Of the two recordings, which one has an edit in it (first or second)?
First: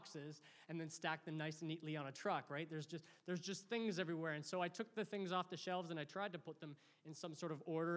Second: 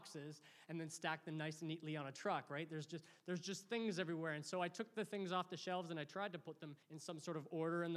second